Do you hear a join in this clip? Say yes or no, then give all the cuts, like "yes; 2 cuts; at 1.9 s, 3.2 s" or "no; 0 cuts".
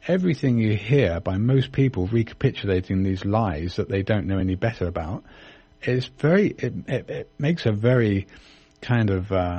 no; 0 cuts